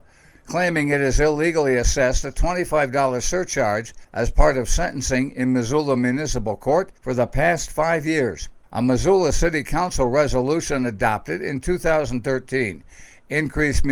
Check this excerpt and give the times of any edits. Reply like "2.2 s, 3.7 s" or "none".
4.0 s, 7.0 s, 8.6 s